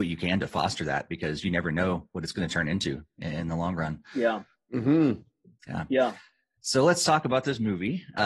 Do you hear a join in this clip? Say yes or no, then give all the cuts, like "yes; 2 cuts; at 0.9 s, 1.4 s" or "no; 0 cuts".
no; 0 cuts